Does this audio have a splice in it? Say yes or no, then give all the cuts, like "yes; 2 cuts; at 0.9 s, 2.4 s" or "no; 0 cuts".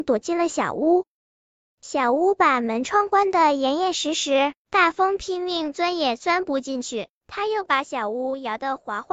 yes; 1 cut; at 1.3 s